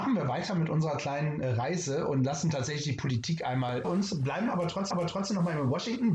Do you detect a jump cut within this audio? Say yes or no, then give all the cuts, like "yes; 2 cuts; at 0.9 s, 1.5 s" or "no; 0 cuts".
yes; 3 cuts; at 1.4 s, 3.8 s, 4.9 s